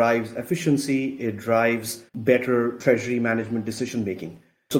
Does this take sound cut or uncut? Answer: cut